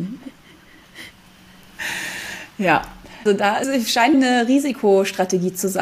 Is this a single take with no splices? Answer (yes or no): no